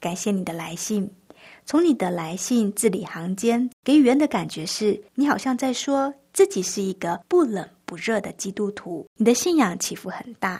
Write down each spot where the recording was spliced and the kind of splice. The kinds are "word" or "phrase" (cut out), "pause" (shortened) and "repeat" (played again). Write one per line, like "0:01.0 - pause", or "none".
0:03.7 - pause
0:05.1 - pause
0:07.2 - pause
0:09.1 - pause